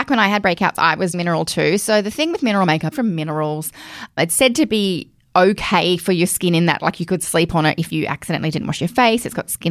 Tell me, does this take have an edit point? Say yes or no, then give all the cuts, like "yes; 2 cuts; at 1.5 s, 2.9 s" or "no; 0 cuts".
yes; 2 cuts; at 1.1 s, 2.9 s